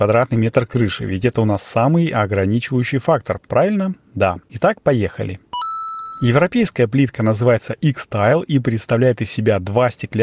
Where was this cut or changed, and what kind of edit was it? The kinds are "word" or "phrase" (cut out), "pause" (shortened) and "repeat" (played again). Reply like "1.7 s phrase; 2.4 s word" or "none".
none